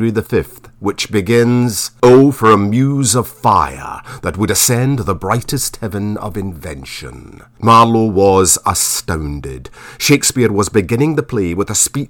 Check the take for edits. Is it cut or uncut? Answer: uncut